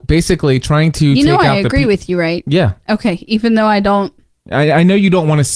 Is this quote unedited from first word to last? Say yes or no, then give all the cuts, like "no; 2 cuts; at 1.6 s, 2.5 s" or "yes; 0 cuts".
yes; 0 cuts